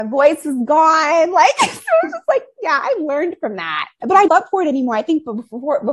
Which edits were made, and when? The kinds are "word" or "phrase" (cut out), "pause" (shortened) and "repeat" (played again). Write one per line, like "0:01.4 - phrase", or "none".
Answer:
0:04.3 - phrase